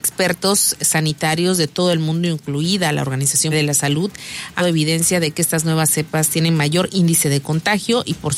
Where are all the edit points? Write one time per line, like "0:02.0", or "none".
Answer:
0:03.5
0:04.6